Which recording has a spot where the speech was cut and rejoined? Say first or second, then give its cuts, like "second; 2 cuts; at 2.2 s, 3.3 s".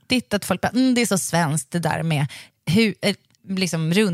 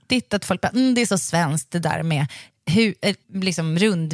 second; 1 cut; at 3.2 s